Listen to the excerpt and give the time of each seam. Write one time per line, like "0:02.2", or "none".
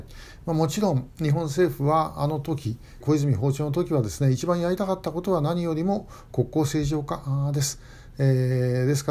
0:03.0